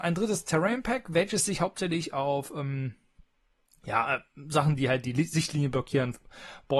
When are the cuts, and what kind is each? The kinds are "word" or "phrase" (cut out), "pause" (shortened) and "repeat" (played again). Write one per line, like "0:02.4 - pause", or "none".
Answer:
none